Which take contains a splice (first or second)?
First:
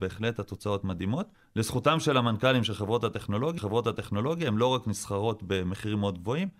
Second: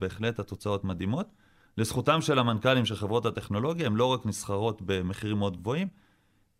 first